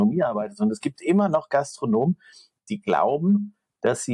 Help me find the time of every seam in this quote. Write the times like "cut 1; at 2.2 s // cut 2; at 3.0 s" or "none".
none